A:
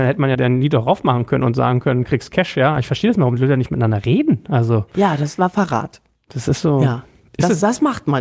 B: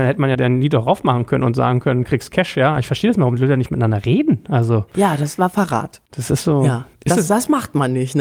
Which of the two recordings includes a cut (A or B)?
B